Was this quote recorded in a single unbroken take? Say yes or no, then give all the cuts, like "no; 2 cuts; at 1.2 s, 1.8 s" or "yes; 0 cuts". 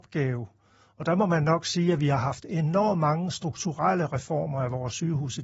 yes; 0 cuts